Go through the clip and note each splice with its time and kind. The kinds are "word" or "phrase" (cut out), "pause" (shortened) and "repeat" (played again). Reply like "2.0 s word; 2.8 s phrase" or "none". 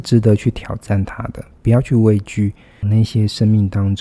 2.8 s word